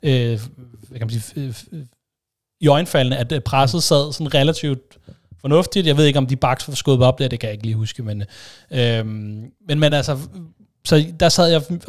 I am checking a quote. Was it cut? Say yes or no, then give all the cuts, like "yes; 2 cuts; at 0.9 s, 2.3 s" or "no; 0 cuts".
no; 0 cuts